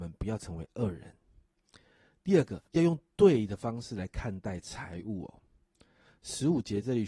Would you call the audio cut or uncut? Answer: cut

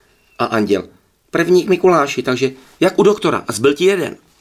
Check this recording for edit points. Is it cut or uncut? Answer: uncut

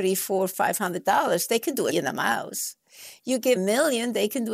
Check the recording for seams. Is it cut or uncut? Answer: cut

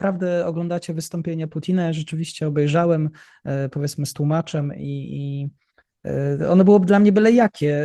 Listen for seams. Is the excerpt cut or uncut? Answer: uncut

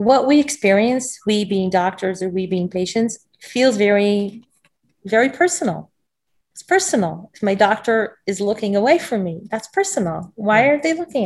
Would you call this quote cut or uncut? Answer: uncut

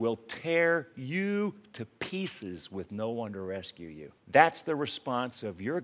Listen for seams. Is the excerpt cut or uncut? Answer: cut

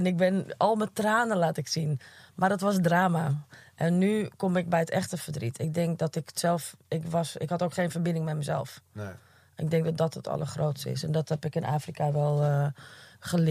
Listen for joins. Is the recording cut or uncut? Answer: uncut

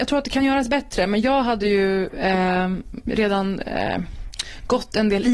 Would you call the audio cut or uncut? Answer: uncut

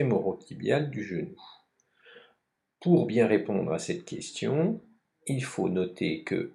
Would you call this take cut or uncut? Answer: uncut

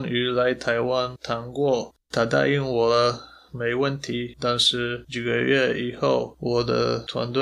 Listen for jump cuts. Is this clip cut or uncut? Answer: cut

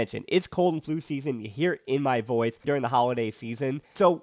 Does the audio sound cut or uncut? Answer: cut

